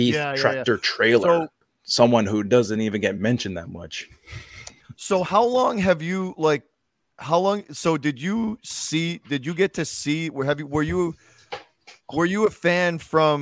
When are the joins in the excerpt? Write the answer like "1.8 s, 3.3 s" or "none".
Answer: none